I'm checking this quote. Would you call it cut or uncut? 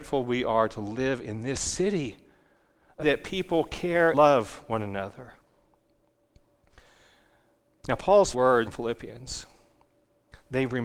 cut